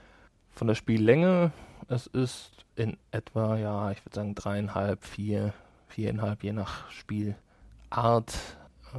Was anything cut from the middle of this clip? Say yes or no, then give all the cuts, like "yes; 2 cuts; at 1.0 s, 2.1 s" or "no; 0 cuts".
no; 0 cuts